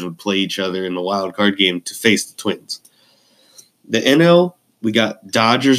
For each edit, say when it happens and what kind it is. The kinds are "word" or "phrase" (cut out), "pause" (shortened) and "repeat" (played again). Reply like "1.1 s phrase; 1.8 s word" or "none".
none

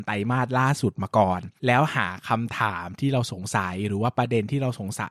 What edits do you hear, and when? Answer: 1.6 s pause

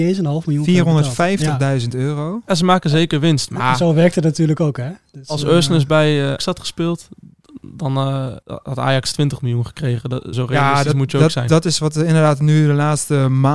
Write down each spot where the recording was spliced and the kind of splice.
6.4 s word; 8.4 s pause; 10.3 s word

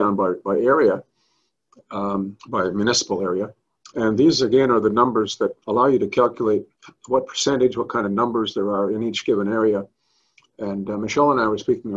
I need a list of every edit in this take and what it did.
2.4 s pause; 3.8 s pause; 5.6 s pause; 6.8 s pause

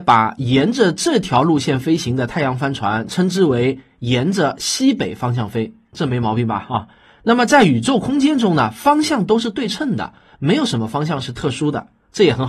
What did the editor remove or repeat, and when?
none

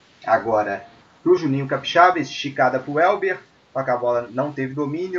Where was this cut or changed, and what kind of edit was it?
none

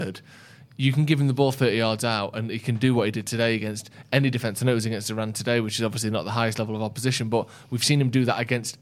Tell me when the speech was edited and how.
none

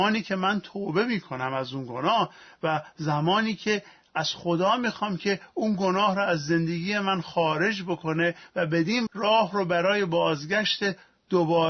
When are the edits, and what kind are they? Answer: 9.1 s word

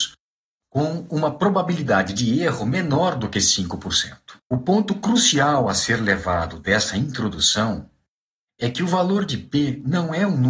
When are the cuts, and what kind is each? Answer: 4.4 s pause

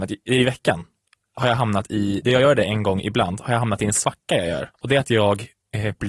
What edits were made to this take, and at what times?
4.7 s pause

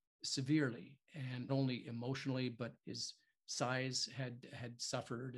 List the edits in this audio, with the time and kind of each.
1.5 s word; 2.8 s word

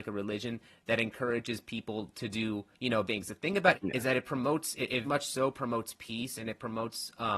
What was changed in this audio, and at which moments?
2.7 s pause; 3.1 s word; 3.7 s word; 5.0 s word

